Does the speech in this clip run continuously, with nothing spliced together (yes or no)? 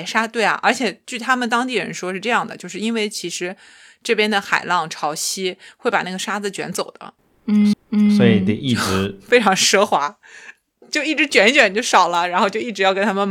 no